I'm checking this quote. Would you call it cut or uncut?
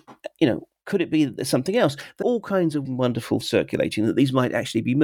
cut